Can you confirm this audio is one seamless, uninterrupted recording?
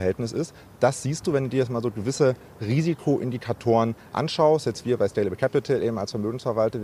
yes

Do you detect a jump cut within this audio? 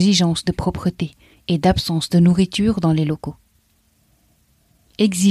no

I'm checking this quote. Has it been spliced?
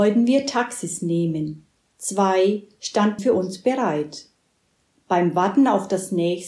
yes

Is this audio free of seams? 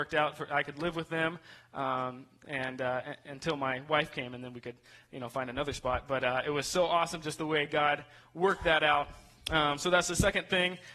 yes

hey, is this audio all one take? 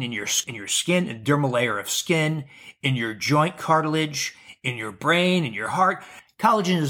yes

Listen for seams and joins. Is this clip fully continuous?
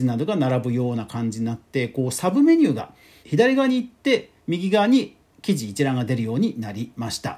no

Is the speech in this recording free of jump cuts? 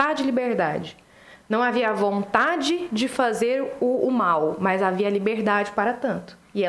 yes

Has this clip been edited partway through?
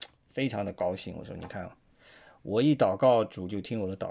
no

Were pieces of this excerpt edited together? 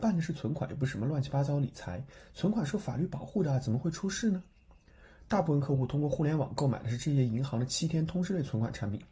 no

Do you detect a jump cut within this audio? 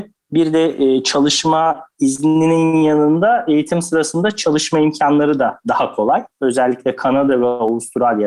yes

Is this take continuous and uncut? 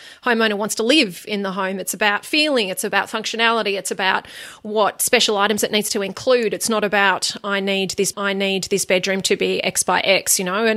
no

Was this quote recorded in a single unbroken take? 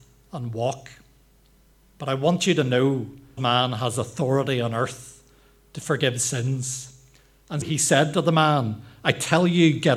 no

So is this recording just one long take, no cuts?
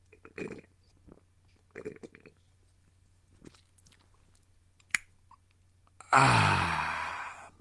yes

